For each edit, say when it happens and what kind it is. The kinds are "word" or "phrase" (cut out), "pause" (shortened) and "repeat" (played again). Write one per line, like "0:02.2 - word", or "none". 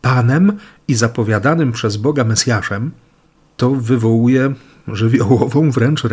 none